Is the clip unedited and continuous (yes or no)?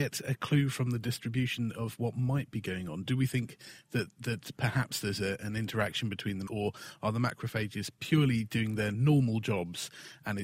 no